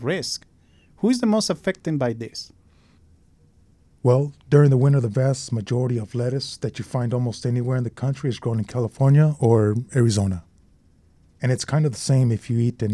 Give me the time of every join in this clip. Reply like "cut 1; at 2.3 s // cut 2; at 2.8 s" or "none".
none